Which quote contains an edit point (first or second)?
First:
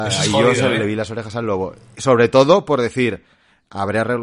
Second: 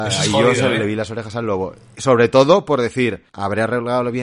second